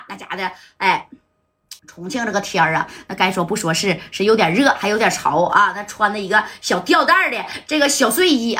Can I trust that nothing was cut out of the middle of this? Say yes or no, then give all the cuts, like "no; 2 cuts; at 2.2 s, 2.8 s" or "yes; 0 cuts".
no; 1 cut; at 1.8 s